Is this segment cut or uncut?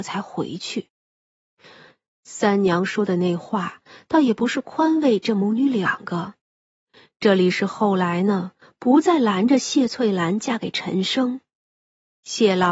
uncut